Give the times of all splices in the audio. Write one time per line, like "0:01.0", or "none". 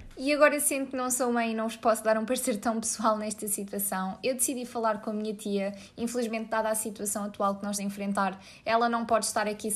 0:07.8